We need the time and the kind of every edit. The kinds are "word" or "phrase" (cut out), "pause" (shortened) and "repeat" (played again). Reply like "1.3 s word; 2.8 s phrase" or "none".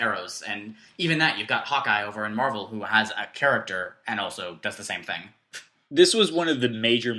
none